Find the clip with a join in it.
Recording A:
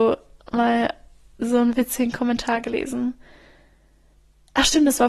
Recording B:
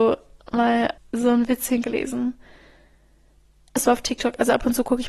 B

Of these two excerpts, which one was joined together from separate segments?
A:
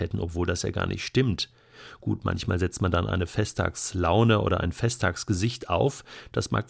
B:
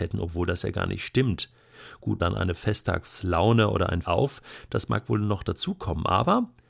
B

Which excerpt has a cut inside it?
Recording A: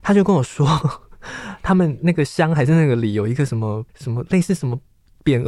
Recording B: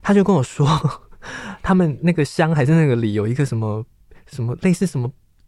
A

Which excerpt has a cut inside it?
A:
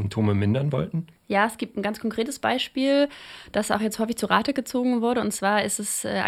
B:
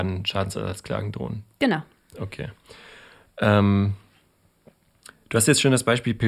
A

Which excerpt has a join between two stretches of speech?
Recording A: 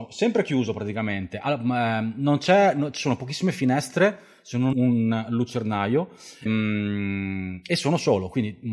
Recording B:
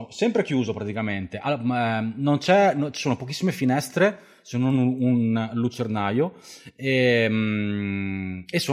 A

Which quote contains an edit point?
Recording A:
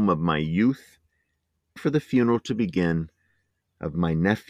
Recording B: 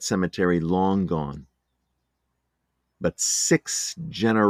A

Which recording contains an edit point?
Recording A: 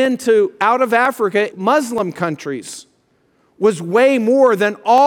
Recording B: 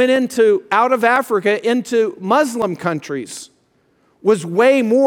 A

